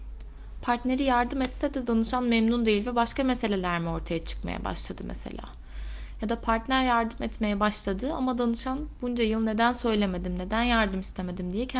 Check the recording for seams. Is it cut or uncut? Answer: uncut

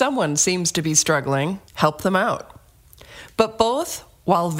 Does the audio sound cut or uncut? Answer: cut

